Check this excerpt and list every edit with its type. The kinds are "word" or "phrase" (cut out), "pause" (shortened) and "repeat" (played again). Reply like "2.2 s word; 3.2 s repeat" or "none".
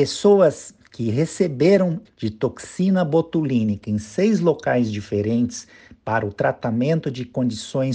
2.0 s word